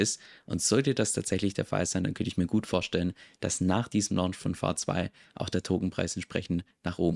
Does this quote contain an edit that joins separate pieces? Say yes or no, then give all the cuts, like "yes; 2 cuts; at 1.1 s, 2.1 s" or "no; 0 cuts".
no; 0 cuts